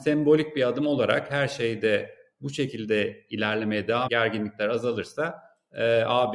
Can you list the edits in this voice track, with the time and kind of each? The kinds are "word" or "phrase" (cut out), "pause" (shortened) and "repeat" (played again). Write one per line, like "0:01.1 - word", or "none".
0:04.1 - word